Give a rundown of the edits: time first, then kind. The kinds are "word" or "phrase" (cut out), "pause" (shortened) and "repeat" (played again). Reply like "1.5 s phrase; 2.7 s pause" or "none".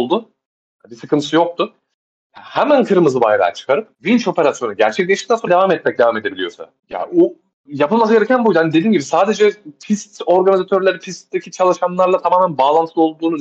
3.9 s pause; 5.5 s word; 6.8 s pause